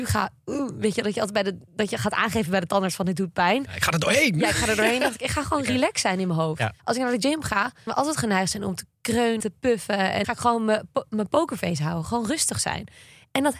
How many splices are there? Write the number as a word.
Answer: four